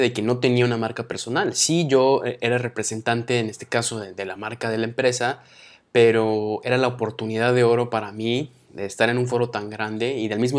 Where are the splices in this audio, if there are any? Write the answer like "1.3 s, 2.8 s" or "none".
none